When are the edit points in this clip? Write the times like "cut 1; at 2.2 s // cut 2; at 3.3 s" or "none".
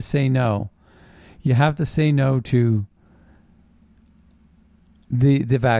none